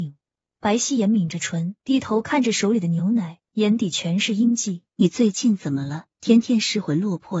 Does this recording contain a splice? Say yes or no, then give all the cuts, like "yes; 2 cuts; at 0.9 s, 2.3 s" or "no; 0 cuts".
yes; 4 cuts; at 1.8 s, 3.4 s, 4.9 s, 6.1 s